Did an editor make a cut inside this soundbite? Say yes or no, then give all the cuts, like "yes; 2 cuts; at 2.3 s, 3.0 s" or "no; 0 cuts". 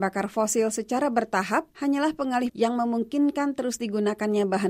yes; 2 cuts; at 1.7 s, 2.5 s